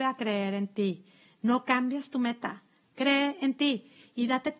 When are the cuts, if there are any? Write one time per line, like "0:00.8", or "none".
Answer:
none